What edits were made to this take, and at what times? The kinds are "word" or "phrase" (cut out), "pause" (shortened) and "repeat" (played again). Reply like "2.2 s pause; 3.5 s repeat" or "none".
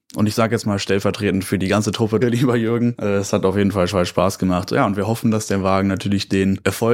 2.2 s word; 3.9 s repeat